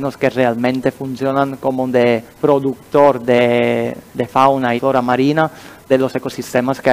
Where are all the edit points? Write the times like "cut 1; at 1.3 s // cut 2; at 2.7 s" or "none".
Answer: cut 1; at 2.3 s // cut 2; at 4.1 s // cut 3; at 4.8 s // cut 4; at 5.9 s